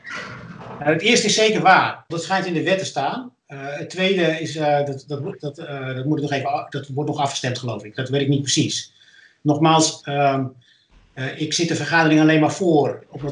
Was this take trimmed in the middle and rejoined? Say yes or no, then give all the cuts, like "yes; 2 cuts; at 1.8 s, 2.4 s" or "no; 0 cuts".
yes; 1 cut; at 2.1 s